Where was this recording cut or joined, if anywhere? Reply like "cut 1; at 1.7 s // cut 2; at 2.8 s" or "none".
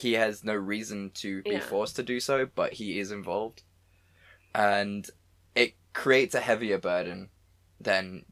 none

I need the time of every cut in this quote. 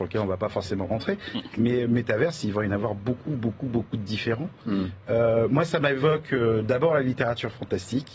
none

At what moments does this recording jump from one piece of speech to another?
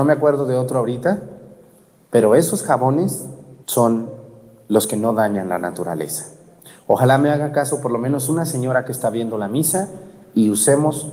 cut 1; at 3.6 s

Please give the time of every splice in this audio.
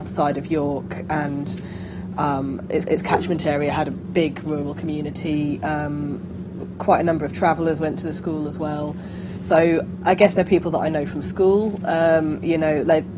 cut 1; at 2.8 s // cut 2; at 4.4 s

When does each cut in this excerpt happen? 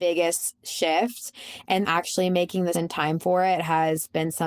cut 1; at 1.8 s // cut 2; at 2.7 s

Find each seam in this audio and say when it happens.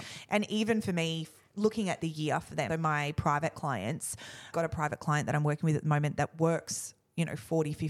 cut 1; at 2.7 s // cut 2; at 4.5 s

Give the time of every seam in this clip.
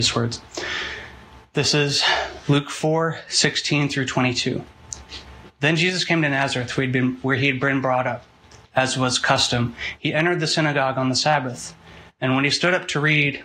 none

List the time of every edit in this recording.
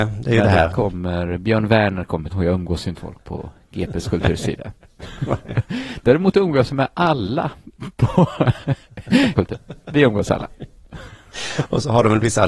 cut 1; at 2.3 s // cut 2; at 3.0 s // cut 3; at 9.4 s

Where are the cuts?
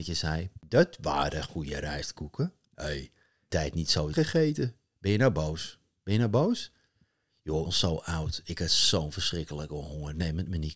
cut 1; at 3.5 s // cut 2; at 4.1 s // cut 3; at 7.7 s

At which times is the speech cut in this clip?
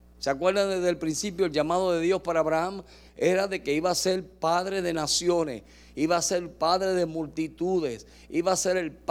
none

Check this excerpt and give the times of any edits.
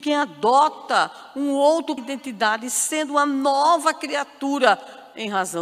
cut 1; at 2.0 s

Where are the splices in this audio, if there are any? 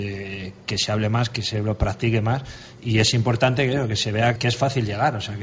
cut 1; at 4.4 s

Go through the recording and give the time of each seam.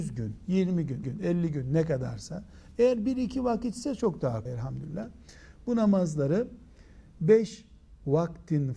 cut 1; at 1.0 s // cut 2; at 4.5 s

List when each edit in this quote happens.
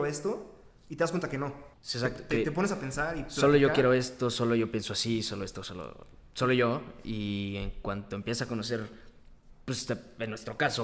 cut 1; at 1.7 s

